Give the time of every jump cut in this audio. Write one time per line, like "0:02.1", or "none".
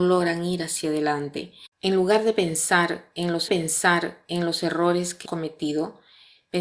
0:01.7
0:03.5
0:05.2